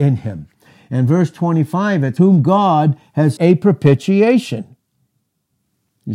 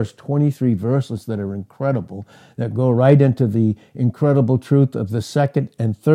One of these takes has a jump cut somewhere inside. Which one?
first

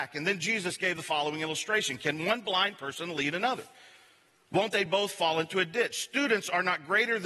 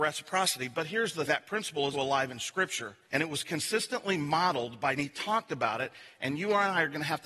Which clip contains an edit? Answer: second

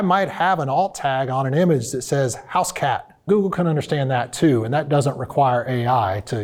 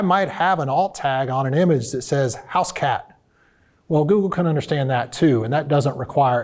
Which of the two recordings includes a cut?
first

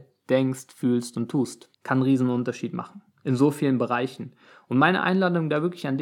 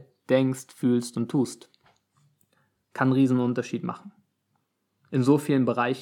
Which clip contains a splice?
first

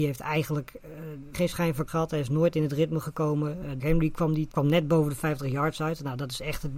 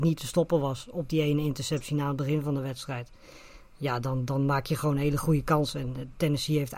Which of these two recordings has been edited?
first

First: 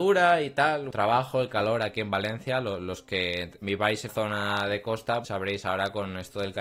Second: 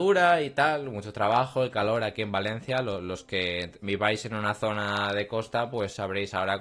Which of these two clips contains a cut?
first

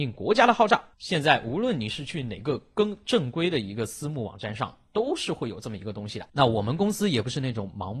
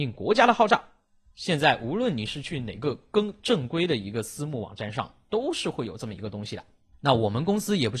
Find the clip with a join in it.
first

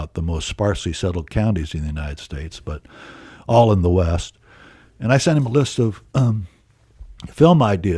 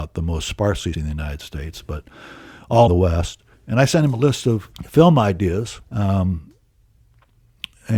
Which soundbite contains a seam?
second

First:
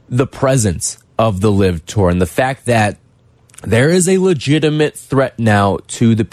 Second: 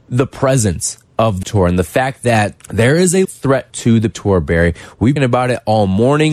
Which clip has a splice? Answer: second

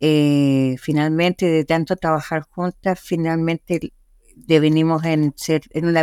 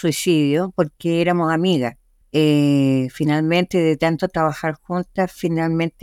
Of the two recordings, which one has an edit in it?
second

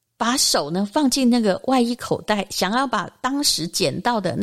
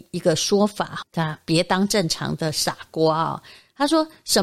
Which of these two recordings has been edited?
second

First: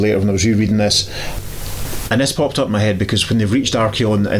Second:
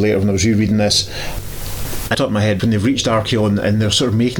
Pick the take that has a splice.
second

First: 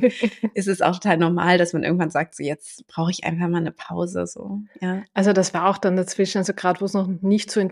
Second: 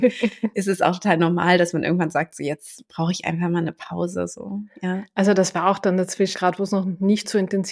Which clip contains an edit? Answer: second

